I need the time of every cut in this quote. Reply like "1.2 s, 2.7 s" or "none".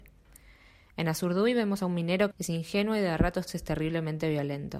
2.3 s